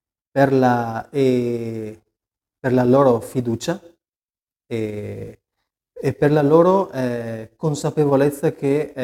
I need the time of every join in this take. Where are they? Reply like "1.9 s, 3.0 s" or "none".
none